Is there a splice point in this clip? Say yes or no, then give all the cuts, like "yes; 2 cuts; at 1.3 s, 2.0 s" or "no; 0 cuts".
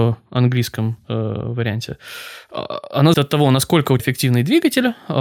yes; 2 cuts; at 3.1 s, 4.0 s